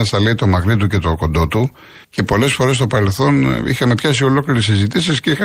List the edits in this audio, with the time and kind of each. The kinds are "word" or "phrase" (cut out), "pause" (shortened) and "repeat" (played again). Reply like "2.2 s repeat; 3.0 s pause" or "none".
2.0 s pause